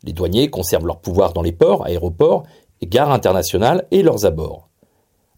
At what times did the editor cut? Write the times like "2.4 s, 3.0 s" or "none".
none